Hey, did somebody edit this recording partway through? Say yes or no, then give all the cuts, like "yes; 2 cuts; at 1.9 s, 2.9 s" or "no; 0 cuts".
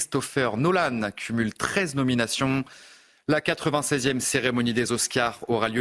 no; 0 cuts